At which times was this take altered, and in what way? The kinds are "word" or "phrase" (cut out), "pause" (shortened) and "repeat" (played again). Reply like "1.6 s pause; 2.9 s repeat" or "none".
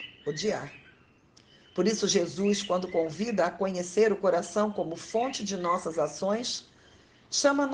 none